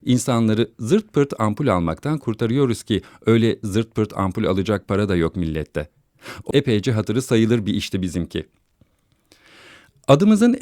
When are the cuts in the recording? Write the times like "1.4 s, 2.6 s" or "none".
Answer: 6.5 s